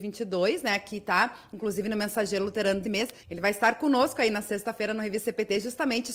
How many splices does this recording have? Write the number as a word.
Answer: two